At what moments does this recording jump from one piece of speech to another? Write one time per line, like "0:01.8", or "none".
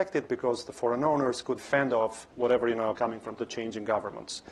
0:01.6
0:02.3
0:03.0
0:03.3